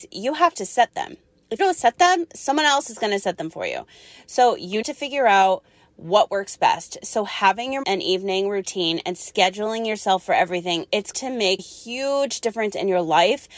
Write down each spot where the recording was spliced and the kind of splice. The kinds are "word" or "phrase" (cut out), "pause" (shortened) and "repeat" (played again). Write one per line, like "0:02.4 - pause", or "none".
0:01.6 - word
0:04.8 - word
0:07.8 - word
0:11.1 - word
0:11.6 - word